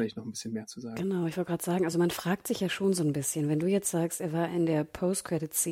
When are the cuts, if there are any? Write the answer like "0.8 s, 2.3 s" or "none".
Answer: none